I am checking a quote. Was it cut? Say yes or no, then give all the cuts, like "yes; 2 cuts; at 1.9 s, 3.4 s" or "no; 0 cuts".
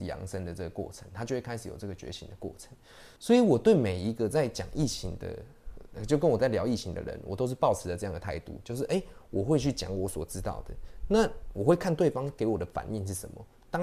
yes; 1 cut; at 3.2 s